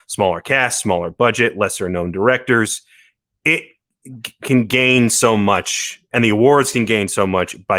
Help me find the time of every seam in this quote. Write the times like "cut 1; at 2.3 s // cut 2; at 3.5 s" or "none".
none